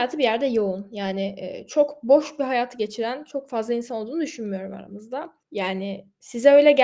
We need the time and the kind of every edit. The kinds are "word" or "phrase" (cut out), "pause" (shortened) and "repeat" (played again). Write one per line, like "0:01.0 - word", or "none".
0:05.4 - pause